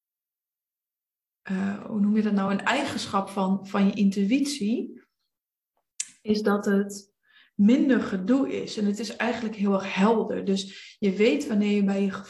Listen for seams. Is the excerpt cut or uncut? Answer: uncut